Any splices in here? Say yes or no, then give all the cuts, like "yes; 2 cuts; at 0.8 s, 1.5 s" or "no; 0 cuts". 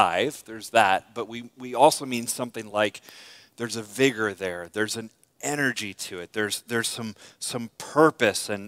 no; 0 cuts